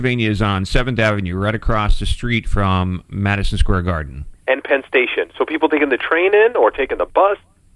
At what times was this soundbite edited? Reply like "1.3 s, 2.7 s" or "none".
4.4 s